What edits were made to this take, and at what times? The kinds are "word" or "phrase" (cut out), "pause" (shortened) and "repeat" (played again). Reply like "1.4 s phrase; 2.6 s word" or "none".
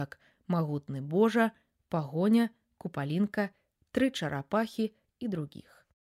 none